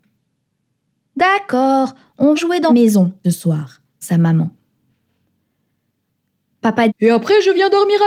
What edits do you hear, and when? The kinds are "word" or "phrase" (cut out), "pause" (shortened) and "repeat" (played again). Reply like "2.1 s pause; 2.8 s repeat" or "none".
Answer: 2.4 s word; 2.7 s word; 3.2 s word; 4.0 s word; 6.9 s word